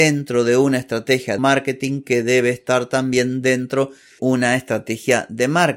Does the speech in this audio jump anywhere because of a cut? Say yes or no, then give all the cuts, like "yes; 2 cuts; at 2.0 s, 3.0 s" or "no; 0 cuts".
yes; 2 cuts; at 1.4 s, 4.2 s